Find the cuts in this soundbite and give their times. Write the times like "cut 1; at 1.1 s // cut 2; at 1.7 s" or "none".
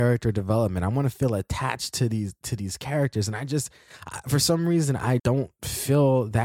cut 1; at 5.2 s